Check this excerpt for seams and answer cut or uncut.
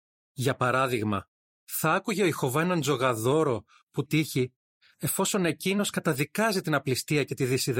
cut